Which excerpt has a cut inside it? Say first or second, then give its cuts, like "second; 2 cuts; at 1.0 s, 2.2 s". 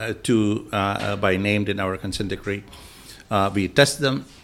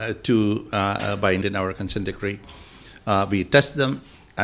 second; 1 cut; at 1.4 s